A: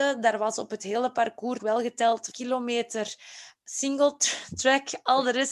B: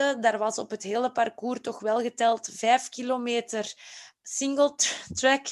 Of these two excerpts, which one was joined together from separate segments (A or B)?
A